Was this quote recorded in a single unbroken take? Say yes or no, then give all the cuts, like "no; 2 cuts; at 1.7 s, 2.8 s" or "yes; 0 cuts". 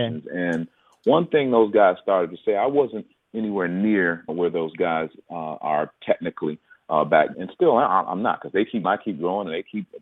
no; 3 cuts; at 4.3 s, 7.3 s, 8.8 s